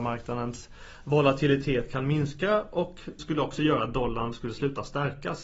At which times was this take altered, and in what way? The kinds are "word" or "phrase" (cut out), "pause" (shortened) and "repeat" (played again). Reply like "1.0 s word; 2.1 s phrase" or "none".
3.2 s word